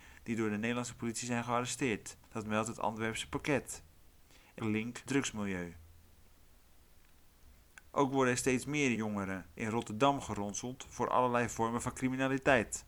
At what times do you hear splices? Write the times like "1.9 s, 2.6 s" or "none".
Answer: 2.2 s, 4.6 s, 5.1 s, 9.0 s